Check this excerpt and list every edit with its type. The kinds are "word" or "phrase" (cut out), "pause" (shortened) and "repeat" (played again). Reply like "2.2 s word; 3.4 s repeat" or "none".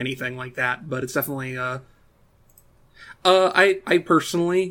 none

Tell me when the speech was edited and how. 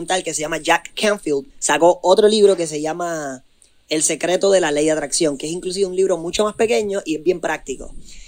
1.5 s pause

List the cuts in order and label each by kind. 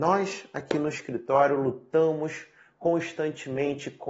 none

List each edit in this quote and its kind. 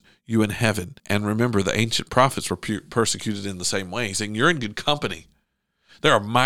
1.0 s pause

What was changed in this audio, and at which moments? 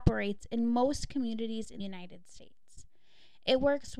1.8 s word

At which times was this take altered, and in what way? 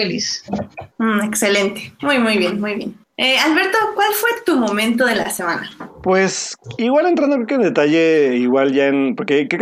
0.9 s pause; 3.0 s pause

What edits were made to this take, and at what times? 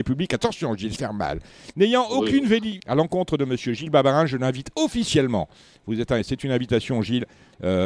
1.0 s word; 2.8 s word

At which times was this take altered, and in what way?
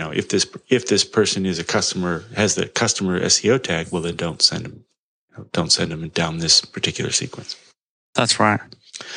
none

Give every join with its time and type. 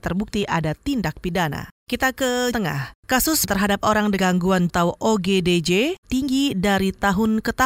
1.8 s pause; 2.5 s word; 3.4 s word; 4.2 s word; 4.7 s word; 6.0 s word

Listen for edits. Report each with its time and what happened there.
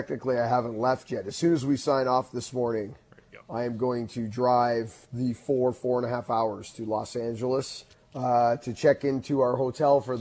7.9 s pause

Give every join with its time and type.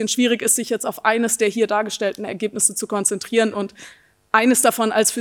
none

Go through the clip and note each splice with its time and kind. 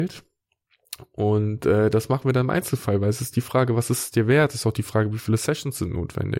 none

